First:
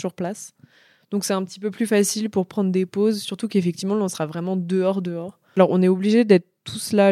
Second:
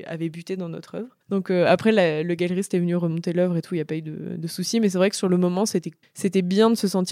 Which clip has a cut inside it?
second; 2 cuts; at 1.2 s, 6.0 s

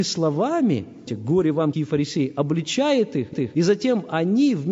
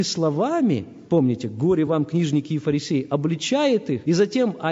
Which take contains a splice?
first; 3 cuts; at 1.1 s, 1.7 s, 3.3 s

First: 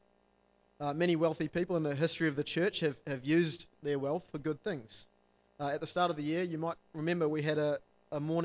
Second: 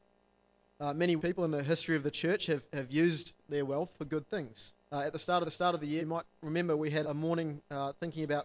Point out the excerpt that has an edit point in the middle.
second; 5 cuts; at 1.2 s, 4.8 s, 5.4 s, 6.0 s, 7.0 s

